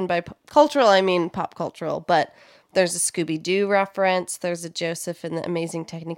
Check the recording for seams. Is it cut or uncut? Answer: uncut